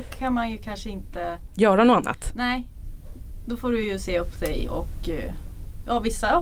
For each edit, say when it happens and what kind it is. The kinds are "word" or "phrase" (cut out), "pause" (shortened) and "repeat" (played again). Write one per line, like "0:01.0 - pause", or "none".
none